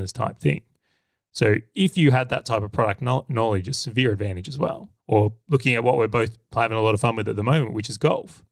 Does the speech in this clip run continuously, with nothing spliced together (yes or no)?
no